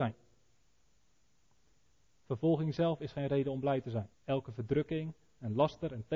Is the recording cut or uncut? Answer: cut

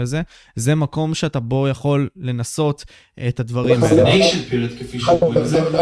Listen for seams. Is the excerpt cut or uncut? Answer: uncut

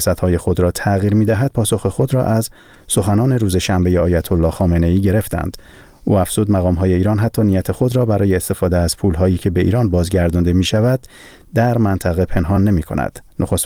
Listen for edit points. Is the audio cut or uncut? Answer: uncut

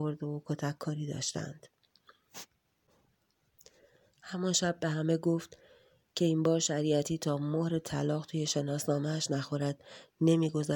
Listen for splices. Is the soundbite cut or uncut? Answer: uncut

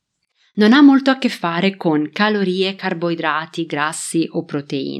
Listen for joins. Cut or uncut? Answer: uncut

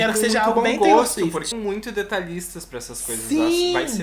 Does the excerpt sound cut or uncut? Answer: cut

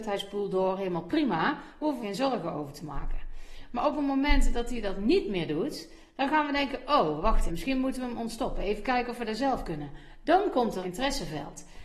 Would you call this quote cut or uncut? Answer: cut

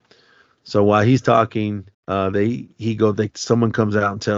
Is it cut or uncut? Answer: cut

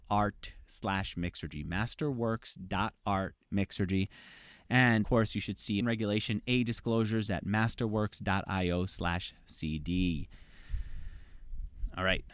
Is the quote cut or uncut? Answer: cut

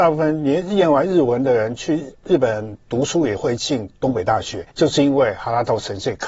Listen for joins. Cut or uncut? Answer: cut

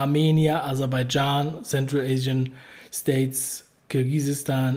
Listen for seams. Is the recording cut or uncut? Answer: uncut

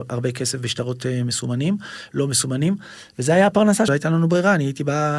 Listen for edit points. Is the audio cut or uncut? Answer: cut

